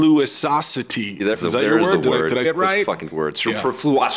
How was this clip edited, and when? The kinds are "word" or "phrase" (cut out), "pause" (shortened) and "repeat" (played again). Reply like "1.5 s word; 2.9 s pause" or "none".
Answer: 1.3 s word; 2.4 s word; 3.1 s word

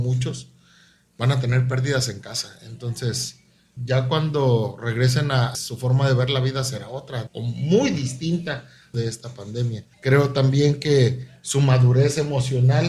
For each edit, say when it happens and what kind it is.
3.8 s word; 5.5 s phrase; 7.3 s word; 8.9 s phrase; 9.9 s pause

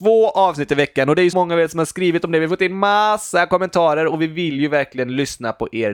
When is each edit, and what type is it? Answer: 1.3 s word

